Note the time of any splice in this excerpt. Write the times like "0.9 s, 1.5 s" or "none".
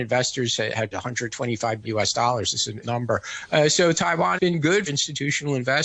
0.9 s, 1.8 s, 2.8 s, 4.3 s, 4.9 s